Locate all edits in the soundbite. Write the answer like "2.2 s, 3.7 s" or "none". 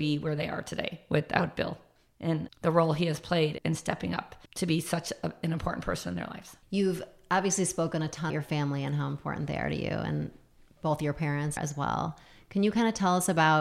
2.5 s, 3.6 s, 4.5 s, 6.6 s, 8.3 s, 11.6 s

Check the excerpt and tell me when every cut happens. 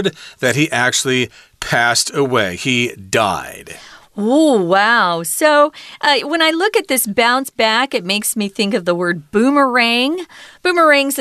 none

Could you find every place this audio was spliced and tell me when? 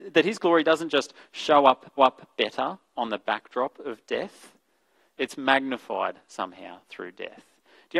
2.0 s

